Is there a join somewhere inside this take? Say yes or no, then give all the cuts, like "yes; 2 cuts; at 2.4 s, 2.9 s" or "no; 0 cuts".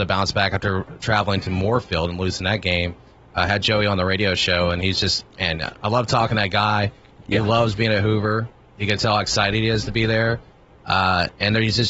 no; 0 cuts